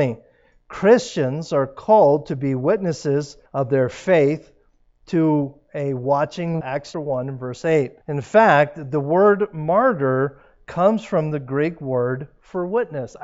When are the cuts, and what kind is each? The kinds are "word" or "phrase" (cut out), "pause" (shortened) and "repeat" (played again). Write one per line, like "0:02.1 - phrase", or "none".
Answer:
0:03.5 - pause
0:06.6 - word
0:06.9 - word
0:08.0 - pause